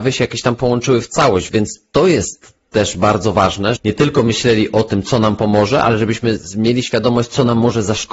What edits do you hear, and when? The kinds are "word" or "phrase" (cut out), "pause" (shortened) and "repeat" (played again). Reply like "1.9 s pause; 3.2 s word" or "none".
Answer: 1.5 s word; 3.8 s word